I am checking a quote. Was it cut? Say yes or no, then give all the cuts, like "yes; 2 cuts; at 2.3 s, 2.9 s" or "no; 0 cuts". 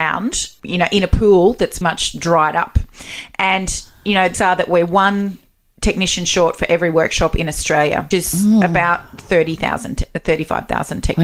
yes; 3 cuts; at 1.8 s, 4.3 s, 8.1 s